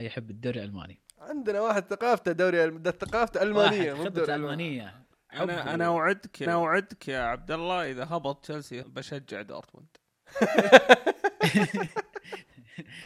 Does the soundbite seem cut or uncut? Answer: cut